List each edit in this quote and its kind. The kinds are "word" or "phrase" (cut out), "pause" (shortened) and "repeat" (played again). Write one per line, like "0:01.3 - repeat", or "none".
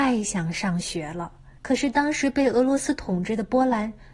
0:01.6 - pause